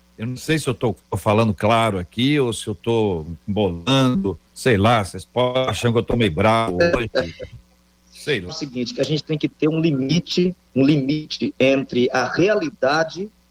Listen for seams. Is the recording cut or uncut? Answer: cut